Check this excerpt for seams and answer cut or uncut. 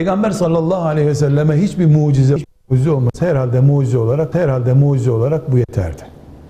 cut